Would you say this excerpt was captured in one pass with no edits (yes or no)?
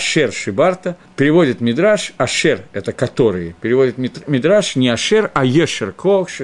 no